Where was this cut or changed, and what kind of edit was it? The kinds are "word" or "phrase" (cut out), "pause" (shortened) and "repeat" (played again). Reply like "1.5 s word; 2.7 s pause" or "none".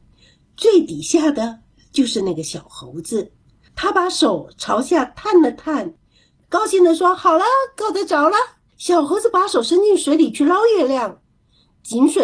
8.7 s pause